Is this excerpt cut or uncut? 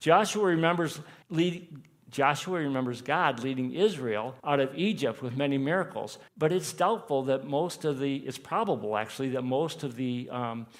cut